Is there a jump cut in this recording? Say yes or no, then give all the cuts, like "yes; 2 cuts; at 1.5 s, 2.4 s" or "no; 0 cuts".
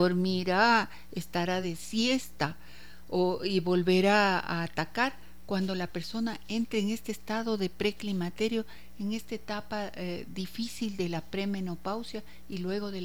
no; 0 cuts